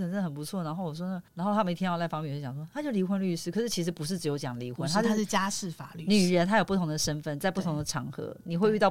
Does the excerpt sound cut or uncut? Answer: cut